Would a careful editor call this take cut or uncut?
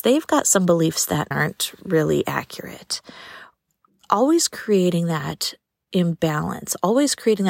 cut